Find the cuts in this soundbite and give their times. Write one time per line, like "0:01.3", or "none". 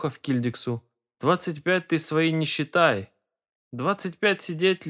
none